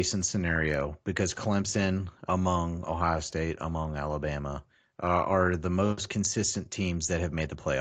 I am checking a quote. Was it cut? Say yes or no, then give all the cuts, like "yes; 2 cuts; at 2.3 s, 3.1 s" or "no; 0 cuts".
no; 0 cuts